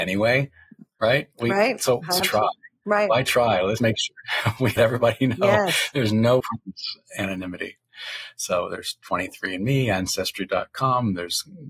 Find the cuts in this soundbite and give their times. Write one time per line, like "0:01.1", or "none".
0:02.2
0:03.8
0:04.8
0:06.4